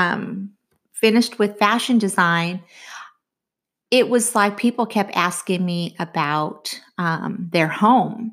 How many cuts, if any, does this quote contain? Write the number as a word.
zero